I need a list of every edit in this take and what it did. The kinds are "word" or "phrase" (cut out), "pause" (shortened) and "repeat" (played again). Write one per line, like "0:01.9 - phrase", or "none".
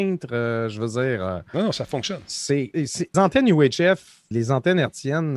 0:02.7 - word
0:03.1 - word
0:04.3 - word